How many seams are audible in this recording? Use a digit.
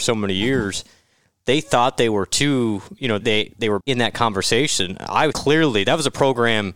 3